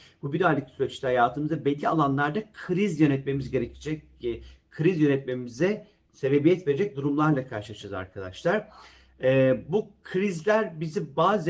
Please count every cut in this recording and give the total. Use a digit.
0